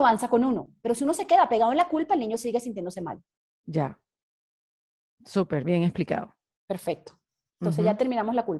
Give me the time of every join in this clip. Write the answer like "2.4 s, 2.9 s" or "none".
none